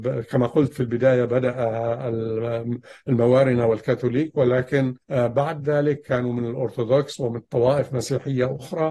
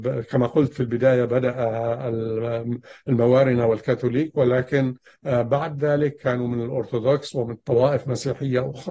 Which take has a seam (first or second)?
first